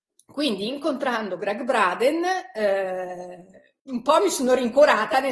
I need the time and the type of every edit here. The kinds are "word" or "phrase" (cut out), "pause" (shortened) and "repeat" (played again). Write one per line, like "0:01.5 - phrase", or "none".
0:03.8 - pause